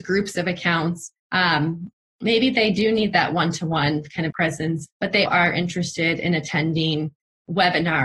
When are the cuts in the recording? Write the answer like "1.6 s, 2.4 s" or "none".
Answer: 1.2 s, 4.3 s, 4.9 s, 5.3 s